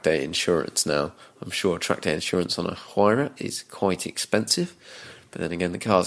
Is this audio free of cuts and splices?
yes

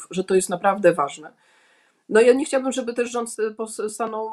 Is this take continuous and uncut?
yes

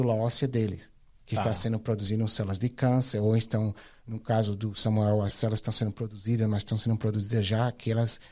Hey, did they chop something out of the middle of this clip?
no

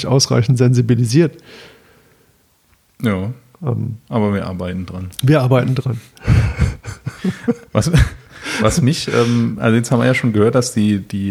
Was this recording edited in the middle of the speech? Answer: yes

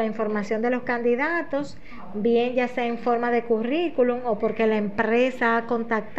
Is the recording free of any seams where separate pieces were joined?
yes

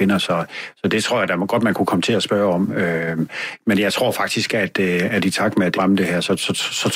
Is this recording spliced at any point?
yes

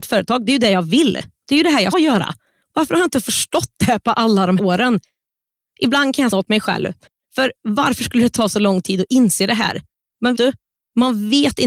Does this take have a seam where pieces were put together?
yes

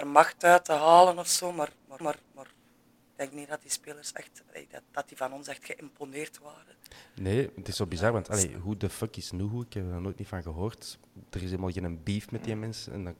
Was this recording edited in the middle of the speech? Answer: yes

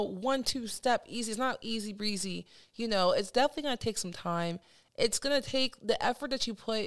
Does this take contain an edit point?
no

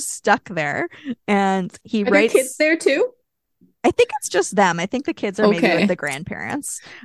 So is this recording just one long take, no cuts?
yes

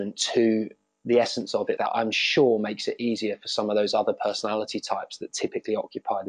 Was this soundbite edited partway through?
yes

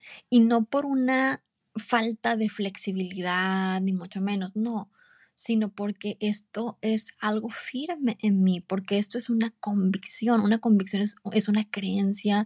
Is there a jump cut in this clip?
no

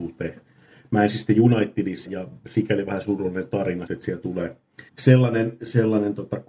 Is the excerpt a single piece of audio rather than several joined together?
no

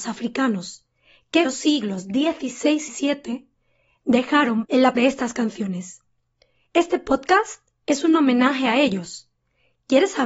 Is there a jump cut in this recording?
yes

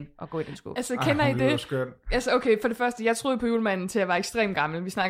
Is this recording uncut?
yes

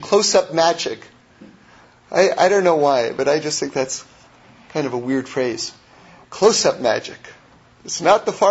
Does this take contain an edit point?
no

